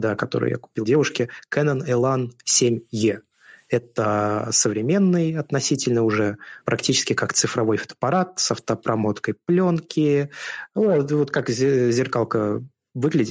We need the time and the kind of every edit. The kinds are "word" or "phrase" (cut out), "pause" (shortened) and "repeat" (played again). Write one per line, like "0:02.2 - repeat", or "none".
none